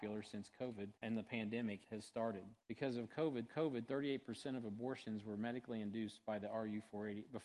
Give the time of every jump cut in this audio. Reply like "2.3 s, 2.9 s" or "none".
1.0 s, 1.8 s, 2.6 s, 3.5 s